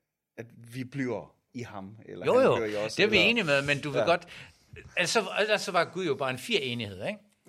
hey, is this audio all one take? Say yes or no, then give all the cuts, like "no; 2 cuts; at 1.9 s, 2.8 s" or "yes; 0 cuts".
yes; 0 cuts